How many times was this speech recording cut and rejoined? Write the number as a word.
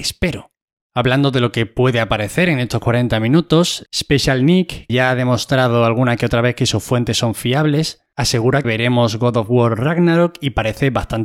two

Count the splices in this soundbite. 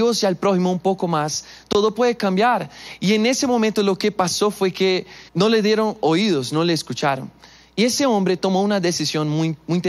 one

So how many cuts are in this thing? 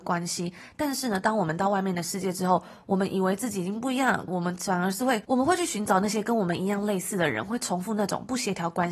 one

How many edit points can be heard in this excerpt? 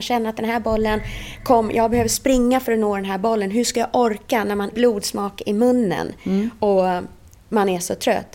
one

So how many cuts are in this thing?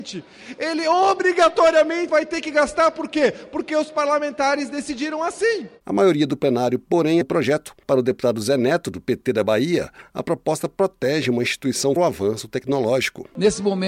three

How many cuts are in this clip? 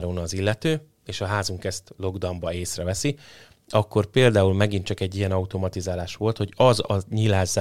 zero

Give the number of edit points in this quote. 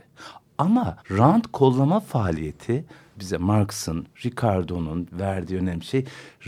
two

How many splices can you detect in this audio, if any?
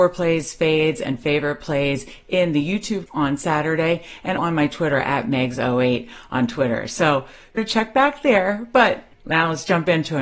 four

